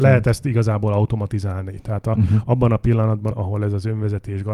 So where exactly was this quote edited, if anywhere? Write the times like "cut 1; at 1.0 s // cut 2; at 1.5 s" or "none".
cut 1; at 3.3 s